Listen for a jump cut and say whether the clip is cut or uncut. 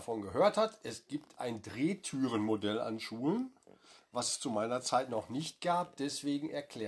uncut